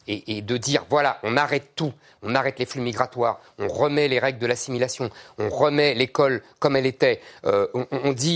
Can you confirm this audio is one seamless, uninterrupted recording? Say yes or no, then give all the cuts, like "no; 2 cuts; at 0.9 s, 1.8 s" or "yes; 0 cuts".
yes; 0 cuts